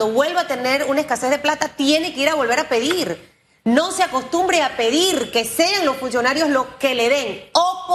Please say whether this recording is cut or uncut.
uncut